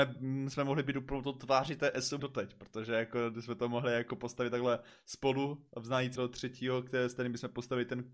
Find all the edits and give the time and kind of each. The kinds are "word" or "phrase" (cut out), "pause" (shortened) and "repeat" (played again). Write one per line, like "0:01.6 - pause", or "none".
0:02.2 - phrase
0:06.2 - phrase